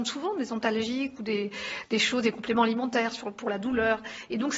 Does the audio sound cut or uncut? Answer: uncut